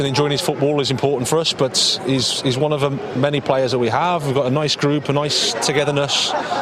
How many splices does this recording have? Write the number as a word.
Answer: zero